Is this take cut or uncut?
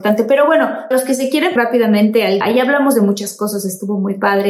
cut